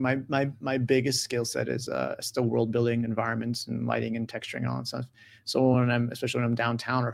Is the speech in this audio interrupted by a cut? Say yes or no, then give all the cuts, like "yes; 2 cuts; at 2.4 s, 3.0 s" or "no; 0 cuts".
no; 0 cuts